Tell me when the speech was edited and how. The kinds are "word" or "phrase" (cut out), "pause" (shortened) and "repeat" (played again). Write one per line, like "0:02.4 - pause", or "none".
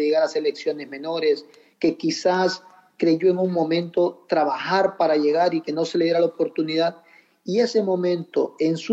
none